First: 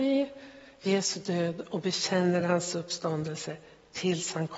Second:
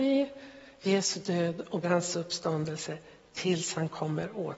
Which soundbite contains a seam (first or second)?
second